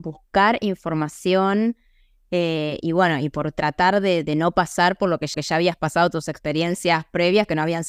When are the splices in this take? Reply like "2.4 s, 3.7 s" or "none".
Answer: 2.8 s, 4.2 s, 5.3 s